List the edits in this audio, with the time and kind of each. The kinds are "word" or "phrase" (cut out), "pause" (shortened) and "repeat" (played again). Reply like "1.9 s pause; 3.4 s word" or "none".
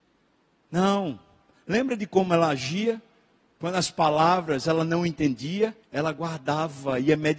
5.8 s pause